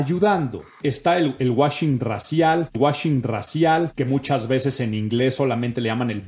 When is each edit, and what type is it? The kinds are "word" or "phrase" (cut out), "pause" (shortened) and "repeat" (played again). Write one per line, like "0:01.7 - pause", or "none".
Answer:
0:02.7 - repeat